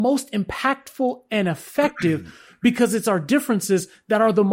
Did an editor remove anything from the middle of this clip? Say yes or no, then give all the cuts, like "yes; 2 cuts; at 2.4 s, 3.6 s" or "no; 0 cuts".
no; 0 cuts